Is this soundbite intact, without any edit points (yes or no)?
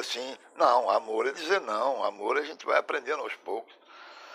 no